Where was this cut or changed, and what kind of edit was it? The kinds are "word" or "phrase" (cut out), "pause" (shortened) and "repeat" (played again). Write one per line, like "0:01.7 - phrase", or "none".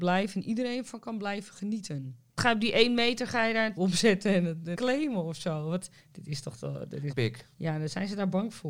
0:03.8 - word
0:04.7 - word
0:06.0 - pause
0:07.1 - word
0:07.5 - pause